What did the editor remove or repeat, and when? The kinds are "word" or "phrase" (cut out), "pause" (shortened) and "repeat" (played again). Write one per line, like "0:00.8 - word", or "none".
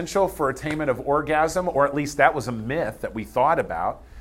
none